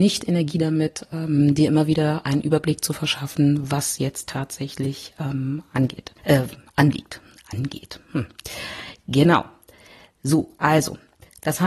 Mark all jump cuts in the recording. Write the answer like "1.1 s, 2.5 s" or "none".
6.2 s